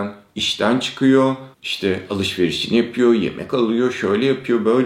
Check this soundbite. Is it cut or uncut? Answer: cut